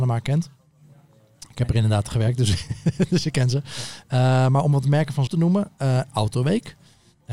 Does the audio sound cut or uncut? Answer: cut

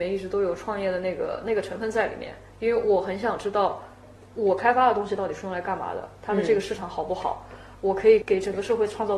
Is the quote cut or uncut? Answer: uncut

